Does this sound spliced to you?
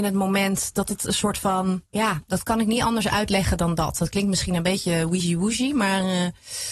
yes; 1 cut; at 1.9 s

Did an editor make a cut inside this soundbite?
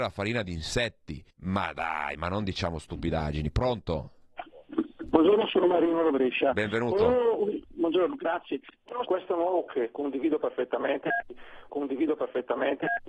yes; 4 cuts; at 1.3 s, 9.0 s, 9.7 s, 11.7 s

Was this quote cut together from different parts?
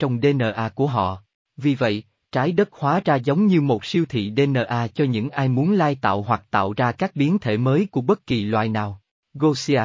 no; 0 cuts

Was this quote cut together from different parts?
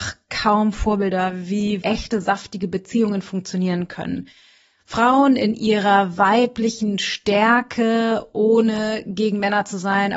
yes; 1 cut; at 1.8 s

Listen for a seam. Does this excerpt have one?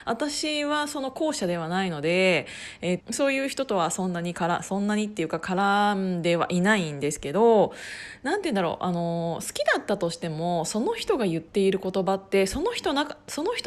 yes; 1 cut; at 3.0 s

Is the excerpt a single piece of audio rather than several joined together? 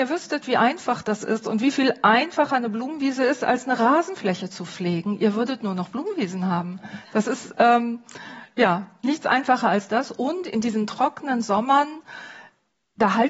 yes; 0 cuts

